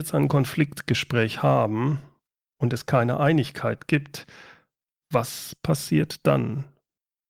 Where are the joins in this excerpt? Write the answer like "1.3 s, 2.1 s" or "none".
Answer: none

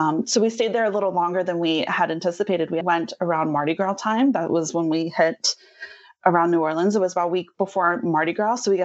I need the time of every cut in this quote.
2.8 s

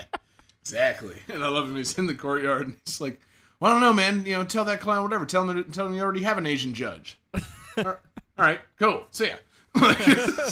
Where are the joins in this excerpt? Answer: none

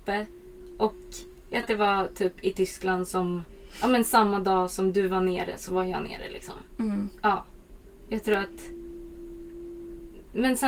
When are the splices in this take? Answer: 1.6 s

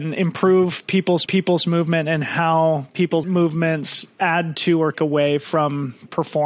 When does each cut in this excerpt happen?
1.3 s, 3.2 s, 4.1 s, 4.9 s

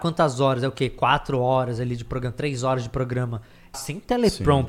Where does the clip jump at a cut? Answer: 3.7 s

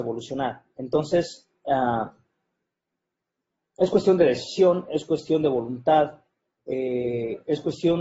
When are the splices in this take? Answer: none

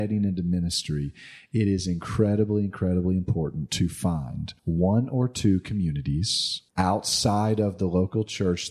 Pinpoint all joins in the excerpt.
4.6 s, 6.7 s

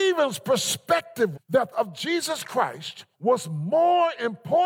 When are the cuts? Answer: 1.3 s, 1.7 s, 3.1 s

